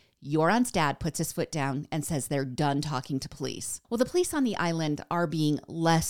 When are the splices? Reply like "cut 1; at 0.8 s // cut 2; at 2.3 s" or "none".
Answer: cut 1; at 3.8 s